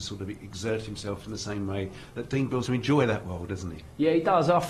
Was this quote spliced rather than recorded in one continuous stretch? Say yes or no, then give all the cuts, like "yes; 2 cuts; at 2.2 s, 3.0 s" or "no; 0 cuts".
yes; 1 cut; at 2.6 s